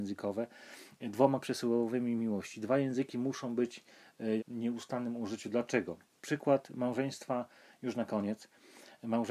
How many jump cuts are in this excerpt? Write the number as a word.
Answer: two